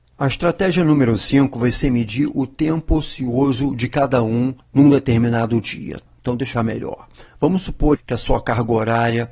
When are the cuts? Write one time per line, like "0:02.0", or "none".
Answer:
0:04.6
0:06.5
0:08.0